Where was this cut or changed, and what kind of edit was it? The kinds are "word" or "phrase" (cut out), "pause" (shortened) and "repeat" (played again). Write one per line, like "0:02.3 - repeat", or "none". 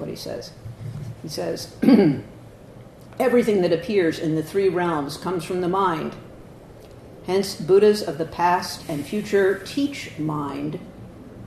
none